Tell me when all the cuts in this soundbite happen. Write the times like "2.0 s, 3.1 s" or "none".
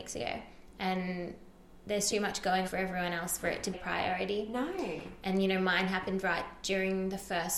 2.1 s, 2.6 s, 3.7 s